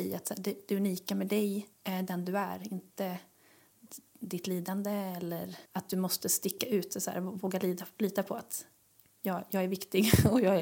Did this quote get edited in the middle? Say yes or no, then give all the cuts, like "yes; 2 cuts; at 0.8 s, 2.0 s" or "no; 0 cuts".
yes; 2 cuts; at 1.7 s, 5.6 s